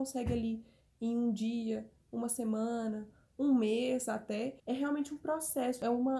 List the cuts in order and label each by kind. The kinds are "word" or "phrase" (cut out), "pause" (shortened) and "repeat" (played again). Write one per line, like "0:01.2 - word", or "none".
0:04.6 - pause